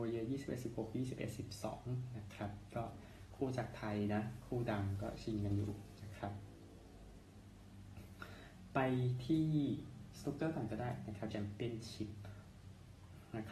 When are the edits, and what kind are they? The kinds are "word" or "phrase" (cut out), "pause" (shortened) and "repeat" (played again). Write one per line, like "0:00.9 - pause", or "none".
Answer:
0:11.3 - word